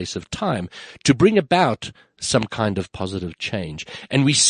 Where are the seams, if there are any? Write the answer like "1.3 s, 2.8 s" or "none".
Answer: none